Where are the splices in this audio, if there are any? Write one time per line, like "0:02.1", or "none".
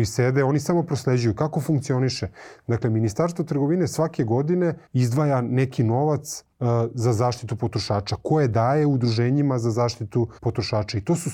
0:04.9
0:06.5
0:10.4